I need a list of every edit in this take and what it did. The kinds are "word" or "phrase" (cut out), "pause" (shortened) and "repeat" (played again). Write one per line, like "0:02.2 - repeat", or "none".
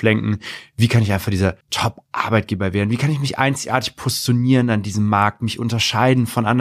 0:01.6 - pause